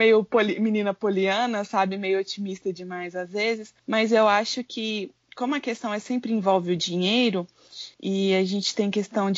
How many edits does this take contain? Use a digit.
2